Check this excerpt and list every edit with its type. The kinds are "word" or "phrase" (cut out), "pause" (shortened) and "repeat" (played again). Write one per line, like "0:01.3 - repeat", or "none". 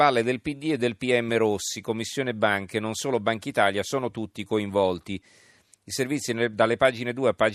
none

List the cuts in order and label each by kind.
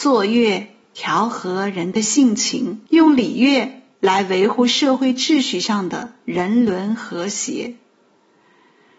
0:02.9 - pause

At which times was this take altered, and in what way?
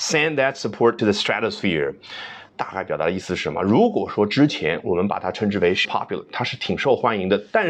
0:01.0 - word
0:02.5 - pause
0:05.8 - word

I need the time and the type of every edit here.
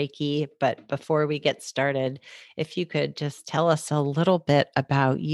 none

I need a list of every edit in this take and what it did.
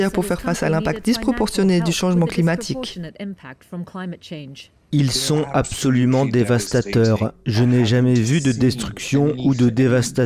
none

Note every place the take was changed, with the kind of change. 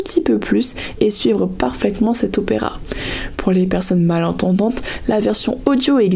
none

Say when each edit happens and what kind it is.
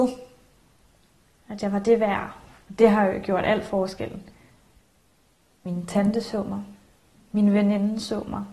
none

